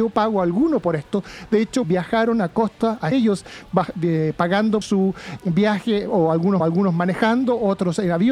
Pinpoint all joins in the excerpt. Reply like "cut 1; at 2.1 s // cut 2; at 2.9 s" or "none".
cut 1; at 1.8 s // cut 2; at 3.1 s // cut 3; at 4.8 s // cut 4; at 5.4 s // cut 5; at 6.6 s